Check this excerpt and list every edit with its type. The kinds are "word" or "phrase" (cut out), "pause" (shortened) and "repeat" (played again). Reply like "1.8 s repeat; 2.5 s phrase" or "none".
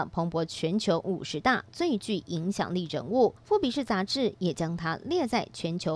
3.4 s pause

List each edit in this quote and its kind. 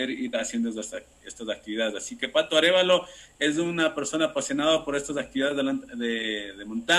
none

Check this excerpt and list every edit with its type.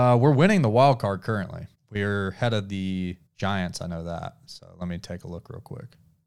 1.7 s pause; 3.3 s pause

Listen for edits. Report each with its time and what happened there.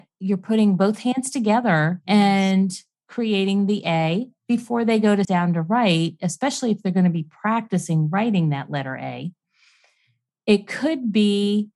5.2 s word

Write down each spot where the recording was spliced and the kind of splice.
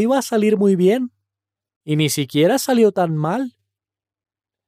none

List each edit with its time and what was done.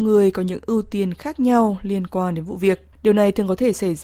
2.9 s pause

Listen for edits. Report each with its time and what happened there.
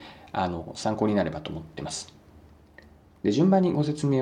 none

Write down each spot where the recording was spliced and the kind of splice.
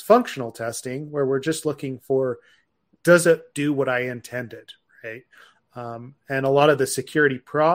none

